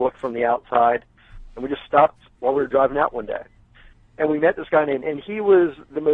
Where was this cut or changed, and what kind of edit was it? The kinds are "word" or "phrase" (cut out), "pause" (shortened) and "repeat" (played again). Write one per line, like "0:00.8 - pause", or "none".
0:05.0 - word

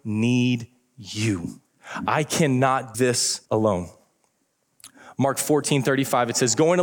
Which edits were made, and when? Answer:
0:02.9 - word
0:03.4 - pause

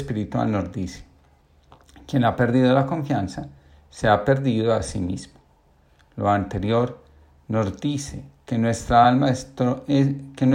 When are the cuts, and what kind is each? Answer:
none

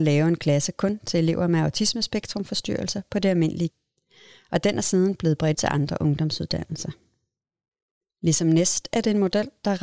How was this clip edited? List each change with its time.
0:03.7 - word
0:05.5 - word

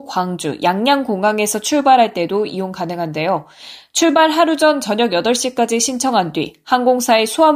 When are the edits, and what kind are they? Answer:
none

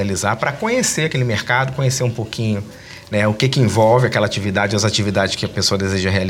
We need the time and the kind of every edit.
none

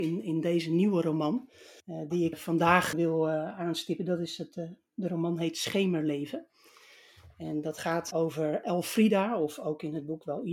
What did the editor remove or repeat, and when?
0:01.8 - pause
0:02.3 - word
0:02.9 - word

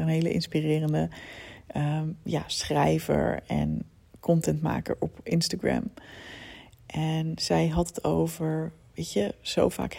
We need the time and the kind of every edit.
none

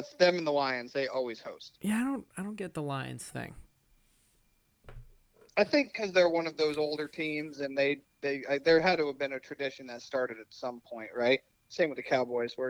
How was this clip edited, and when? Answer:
none

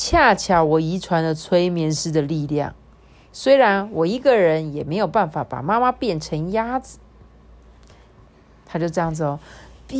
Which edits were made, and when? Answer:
none

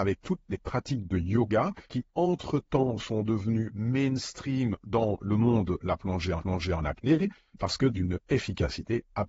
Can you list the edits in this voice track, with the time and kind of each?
0:01.9 - pause
0:05.8 - word
0:06.4 - repeat

